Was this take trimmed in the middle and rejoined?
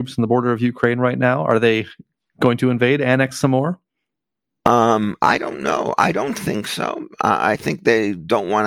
no; 0 cuts

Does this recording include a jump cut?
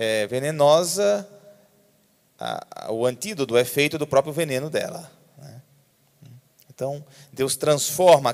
no; 0 cuts

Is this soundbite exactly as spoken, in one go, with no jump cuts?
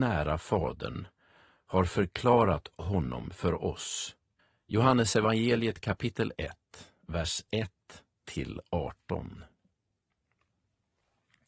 no; 1 cut; at 4.4 s

